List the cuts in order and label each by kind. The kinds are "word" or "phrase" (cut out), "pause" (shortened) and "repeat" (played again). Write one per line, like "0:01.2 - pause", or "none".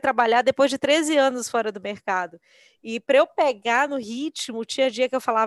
none